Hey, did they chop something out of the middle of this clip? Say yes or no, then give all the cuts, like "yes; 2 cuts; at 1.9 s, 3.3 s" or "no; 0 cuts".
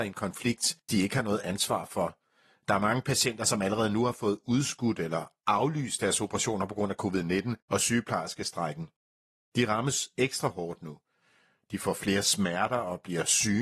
no; 0 cuts